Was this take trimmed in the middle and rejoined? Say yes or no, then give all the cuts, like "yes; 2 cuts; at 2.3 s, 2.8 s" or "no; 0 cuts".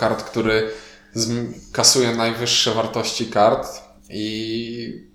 no; 0 cuts